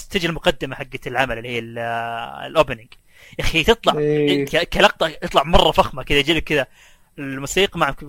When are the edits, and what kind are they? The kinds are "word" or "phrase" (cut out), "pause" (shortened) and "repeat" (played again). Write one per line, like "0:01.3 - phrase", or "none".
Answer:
none